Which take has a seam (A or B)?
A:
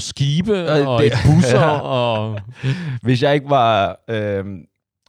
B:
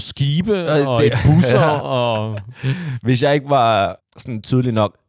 B